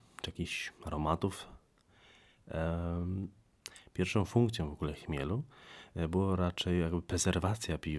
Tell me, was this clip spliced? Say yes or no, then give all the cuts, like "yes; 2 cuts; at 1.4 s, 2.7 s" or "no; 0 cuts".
no; 0 cuts